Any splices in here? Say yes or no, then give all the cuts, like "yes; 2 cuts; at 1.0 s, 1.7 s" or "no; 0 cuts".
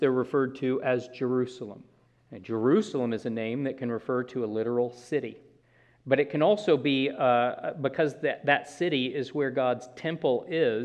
yes; 2 cuts; at 2.1 s, 5.6 s